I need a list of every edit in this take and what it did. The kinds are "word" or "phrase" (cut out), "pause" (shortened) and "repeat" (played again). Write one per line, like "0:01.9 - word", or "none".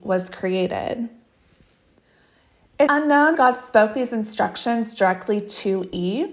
0:02.9 - word
0:03.3 - word